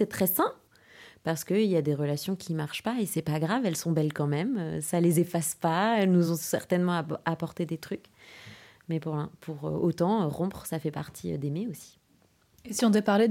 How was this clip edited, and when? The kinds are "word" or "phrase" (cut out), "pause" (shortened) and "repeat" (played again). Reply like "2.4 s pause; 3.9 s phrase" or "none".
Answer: none